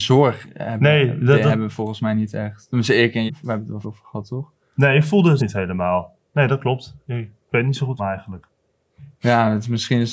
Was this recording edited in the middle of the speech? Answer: yes; 5 cuts; at 3.3 s, 3.8 s, 5.4 s, 6.3 s, 8.0 s

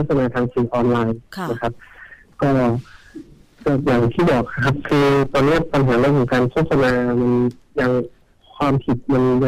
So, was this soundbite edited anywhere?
no; 0 cuts

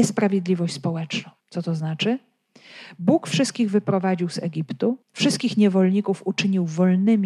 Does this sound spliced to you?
yes; 2 cuts; at 1.4 s, 5.0 s

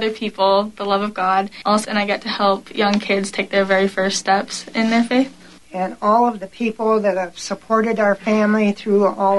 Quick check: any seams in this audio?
yes; 1 cut; at 1.8 s

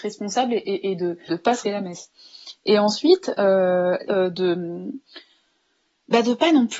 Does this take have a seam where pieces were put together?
yes; 3 cuts; at 1.3 s, 1.6 s, 4.1 s

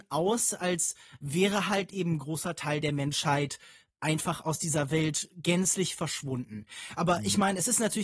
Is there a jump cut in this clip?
no; 0 cuts

